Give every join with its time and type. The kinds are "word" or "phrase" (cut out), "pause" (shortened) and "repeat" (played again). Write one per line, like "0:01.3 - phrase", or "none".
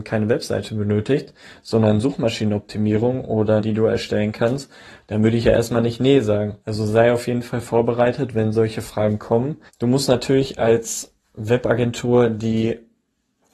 0:03.6 - phrase
0:06.6 - pause
0:09.7 - pause